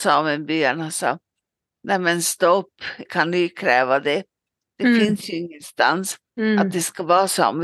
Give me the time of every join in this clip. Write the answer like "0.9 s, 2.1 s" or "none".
3.0 s, 6.2 s